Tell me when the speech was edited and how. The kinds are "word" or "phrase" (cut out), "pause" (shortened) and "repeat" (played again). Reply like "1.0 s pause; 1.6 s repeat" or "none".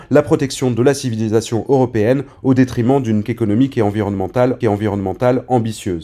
3.3 s word; 4.6 s repeat